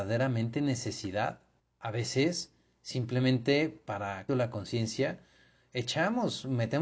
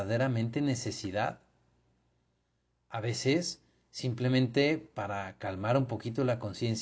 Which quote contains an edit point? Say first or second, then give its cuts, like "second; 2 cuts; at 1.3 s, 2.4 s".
first; 2 cuts; at 1.6 s, 4.3 s